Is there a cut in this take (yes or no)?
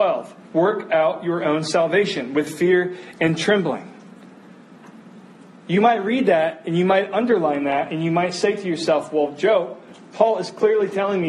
no